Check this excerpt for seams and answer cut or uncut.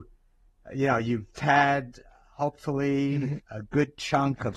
cut